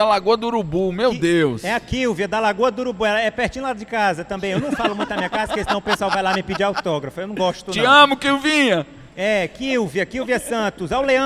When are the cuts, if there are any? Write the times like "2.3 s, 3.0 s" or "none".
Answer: none